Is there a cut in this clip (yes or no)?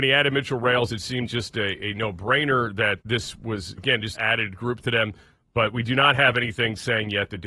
yes